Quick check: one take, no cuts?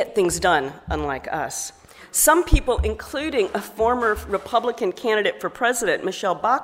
yes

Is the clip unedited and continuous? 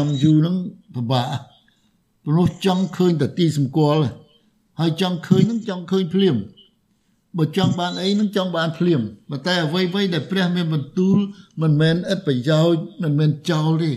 yes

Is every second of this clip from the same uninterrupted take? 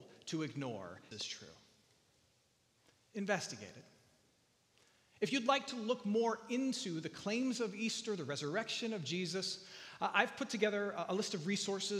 no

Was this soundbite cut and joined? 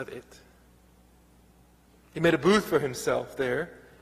no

